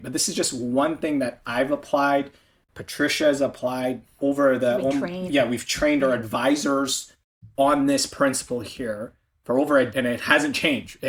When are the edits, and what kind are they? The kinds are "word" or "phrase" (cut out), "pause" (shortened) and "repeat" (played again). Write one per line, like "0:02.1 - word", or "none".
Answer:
0:04.2 - word
0:05.3 - word
0:09.9 - word